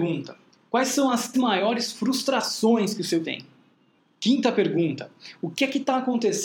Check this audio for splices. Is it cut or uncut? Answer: cut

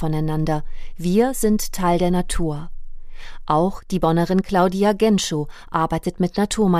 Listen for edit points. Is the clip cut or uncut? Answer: uncut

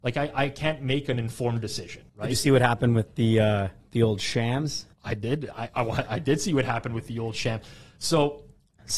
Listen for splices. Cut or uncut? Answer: cut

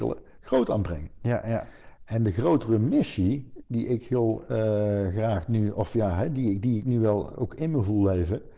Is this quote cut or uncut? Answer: uncut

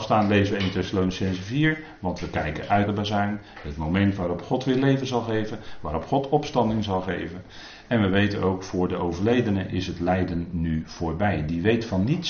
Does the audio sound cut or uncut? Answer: cut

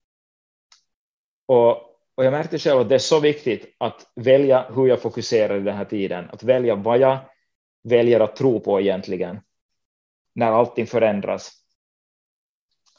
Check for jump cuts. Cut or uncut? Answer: uncut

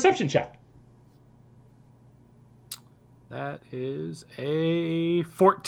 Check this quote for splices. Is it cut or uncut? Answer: uncut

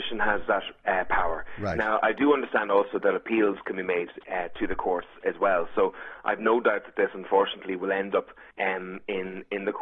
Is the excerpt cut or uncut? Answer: cut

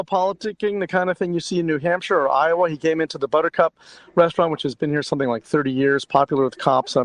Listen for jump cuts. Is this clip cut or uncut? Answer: uncut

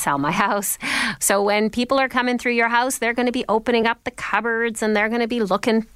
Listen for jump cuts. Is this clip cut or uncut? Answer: uncut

